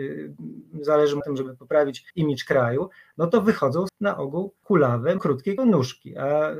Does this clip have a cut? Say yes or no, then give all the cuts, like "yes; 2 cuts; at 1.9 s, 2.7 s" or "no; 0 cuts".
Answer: yes; 6 cuts; at 1.2 s, 2.1 s, 3.9 s, 4.6 s, 5.2 s, 5.6 s